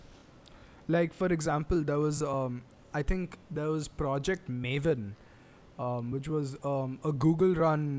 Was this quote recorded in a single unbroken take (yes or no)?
yes